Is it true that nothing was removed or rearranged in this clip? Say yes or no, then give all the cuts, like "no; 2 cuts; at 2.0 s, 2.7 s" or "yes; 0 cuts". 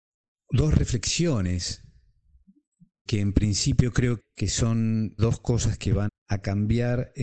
no; 4 cuts; at 3.1 s, 4.2 s, 5.2 s, 6.1 s